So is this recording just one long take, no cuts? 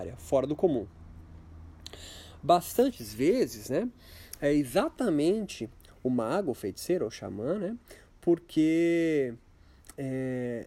yes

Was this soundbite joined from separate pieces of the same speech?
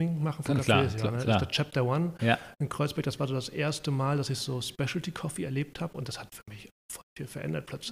no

